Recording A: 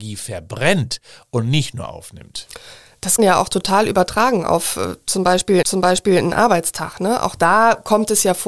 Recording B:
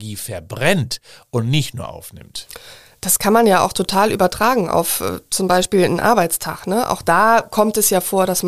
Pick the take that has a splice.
A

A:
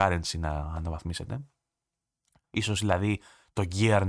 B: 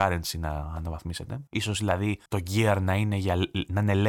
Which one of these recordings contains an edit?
B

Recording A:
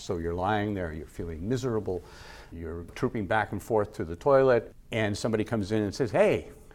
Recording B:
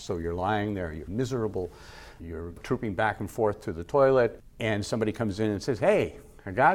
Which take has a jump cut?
B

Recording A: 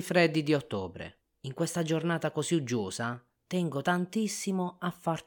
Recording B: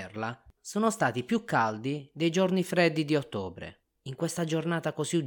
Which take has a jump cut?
A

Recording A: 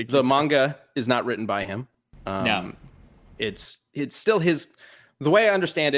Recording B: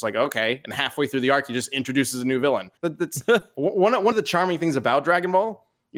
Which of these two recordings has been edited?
B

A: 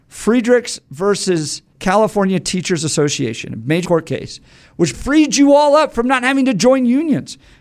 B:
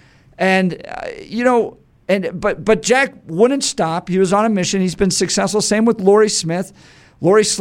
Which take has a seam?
A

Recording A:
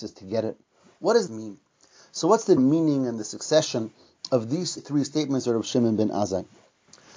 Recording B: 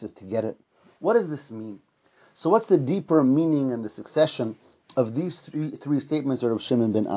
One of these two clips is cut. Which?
A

